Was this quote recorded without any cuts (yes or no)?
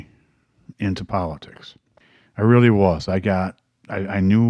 no